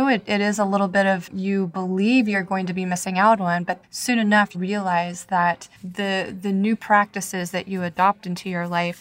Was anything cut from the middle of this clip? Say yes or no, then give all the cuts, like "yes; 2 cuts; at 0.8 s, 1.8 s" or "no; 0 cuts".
yes; 4 cuts; at 1.3 s, 3.8 s, 4.5 s, 5.8 s